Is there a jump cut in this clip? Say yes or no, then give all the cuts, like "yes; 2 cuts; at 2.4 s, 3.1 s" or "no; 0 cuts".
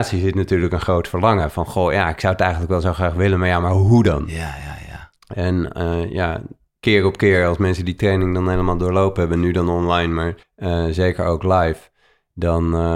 yes; 1 cut; at 10.4 s